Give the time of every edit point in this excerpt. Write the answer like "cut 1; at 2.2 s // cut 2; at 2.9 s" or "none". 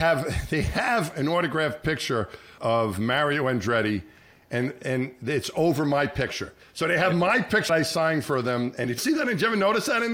cut 1; at 2.6 s // cut 2; at 7.7 s // cut 3; at 9.0 s